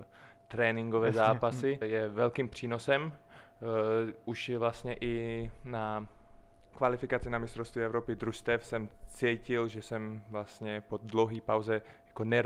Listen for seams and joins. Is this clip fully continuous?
no; 1 cut; at 1.8 s

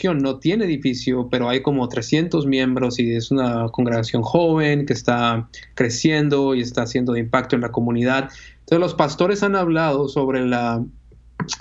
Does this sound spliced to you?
no; 0 cuts

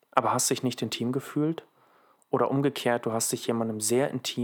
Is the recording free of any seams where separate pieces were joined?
yes; 0 cuts

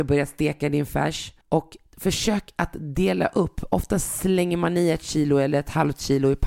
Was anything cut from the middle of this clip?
yes; 1 cut; at 1.4 s

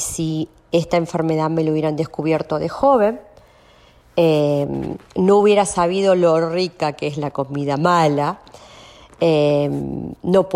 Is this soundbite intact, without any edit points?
yes; 0 cuts

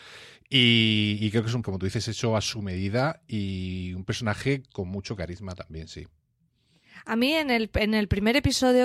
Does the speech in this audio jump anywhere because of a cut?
yes; 1 cut; at 1.6 s

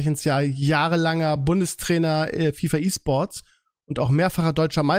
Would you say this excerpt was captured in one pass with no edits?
yes; 0 cuts

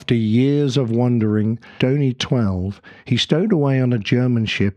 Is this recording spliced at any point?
yes; 1 cut; at 1.8 s

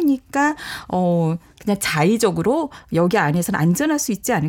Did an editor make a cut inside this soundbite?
no; 0 cuts

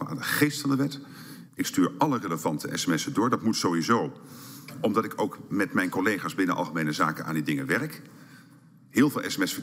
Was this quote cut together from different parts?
no; 0 cuts

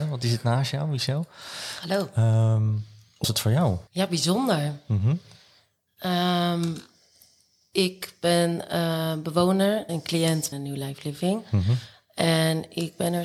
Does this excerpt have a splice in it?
yes; 4 cuts; at 3.2 s, 3.9 s, 9.9 s, 10.5 s

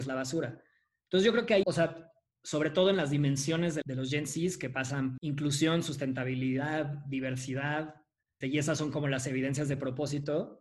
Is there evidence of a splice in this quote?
yes; 4 cuts; at 1.6 s, 3.8 s, 5.2 s, 8.4 s

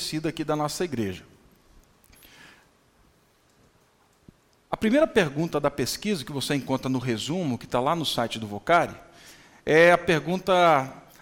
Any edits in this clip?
no; 0 cuts

